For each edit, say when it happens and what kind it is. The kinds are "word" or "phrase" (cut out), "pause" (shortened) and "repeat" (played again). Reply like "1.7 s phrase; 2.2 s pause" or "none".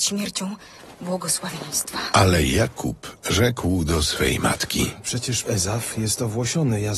5.4 s phrase